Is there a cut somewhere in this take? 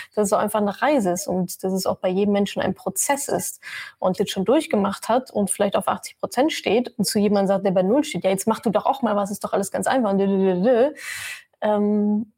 yes; 1 cut; at 4.2 s

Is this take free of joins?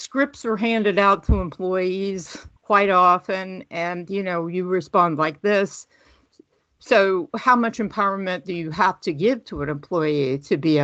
no; 1 cut; at 2.6 s

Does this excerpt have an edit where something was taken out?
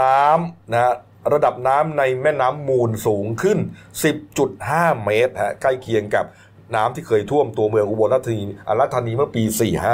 no; 0 cuts

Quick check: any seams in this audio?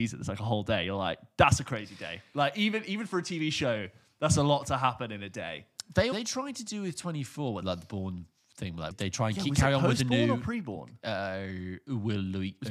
yes; 3 cuts; at 6.1 s, 7.6 s, 8.9 s

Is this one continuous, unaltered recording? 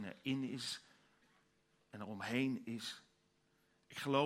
yes; 0 cuts

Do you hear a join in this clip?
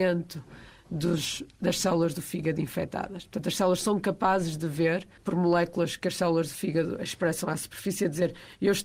yes; 1 cut; at 5.2 s

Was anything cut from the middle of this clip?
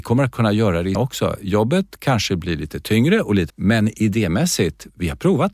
yes; 2 cuts; at 0.9 s, 3.5 s

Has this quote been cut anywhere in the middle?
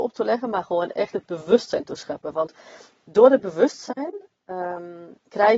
no; 0 cuts

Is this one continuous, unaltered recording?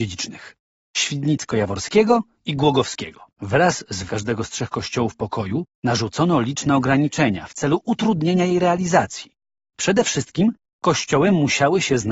no; 3 cuts; at 3.3 s, 4.1 s, 5.7 s

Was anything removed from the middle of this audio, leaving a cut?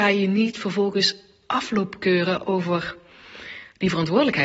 no; 0 cuts

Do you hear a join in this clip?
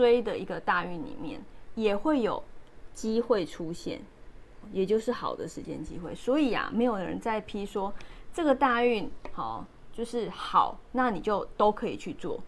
yes; 1 cut; at 4.6 s

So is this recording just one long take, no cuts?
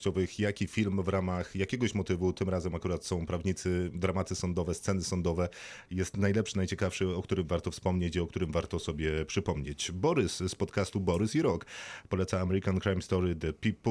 yes; 0 cuts

